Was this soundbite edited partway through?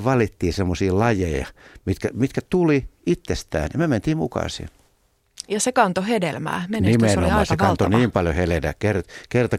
no; 0 cuts

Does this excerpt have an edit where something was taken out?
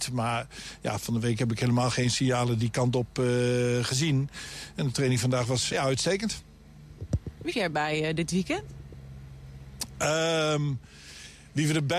yes; 2 cuts; at 5.7 s, 7.5 s

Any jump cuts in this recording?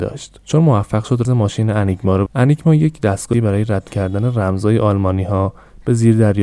yes; 4 cuts; at 1.2 s, 2.3 s, 3.3 s, 3.9 s

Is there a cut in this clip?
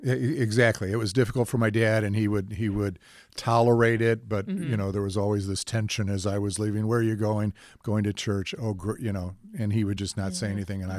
no; 0 cuts

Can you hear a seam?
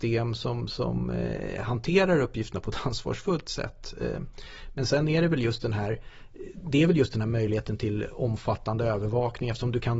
no; 0 cuts

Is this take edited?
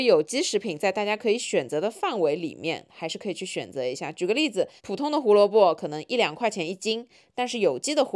yes; 1 cut; at 4.8 s

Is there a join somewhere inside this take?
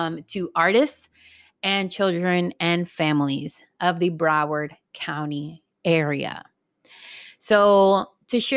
no; 0 cuts

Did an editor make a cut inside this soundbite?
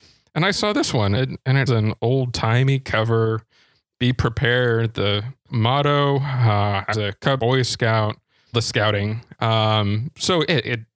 yes; 6 cuts; at 1.2 s, 1.7 s, 5.5 s, 6.9 s, 7.4 s, 8.5 s

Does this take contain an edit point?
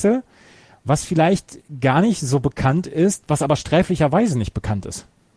no; 0 cuts

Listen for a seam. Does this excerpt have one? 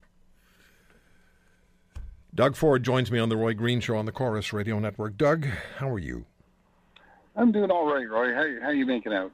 yes; 1 cut; at 2.2 s

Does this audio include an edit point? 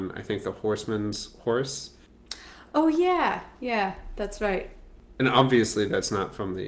no; 0 cuts

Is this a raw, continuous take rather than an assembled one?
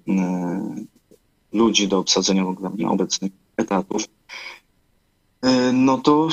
yes; 0 cuts

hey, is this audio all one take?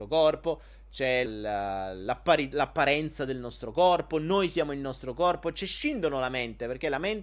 no; 1 cut; at 1.3 s

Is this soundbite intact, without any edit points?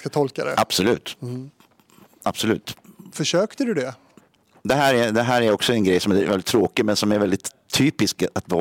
no; 1 cut; at 4.2 s

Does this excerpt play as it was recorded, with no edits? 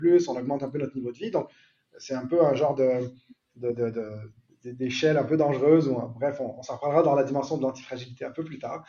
yes; 0 cuts

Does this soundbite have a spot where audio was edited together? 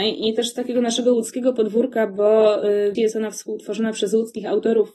yes; 1 cut; at 2.9 s

